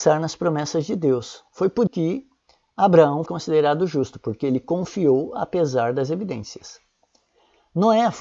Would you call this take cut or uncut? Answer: cut